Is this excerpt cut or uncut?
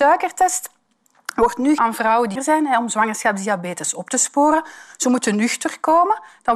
cut